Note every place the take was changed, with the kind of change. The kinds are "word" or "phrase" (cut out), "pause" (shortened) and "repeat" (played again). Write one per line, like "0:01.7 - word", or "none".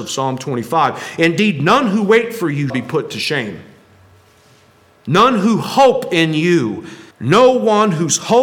0:02.7 - word
0:07.1 - pause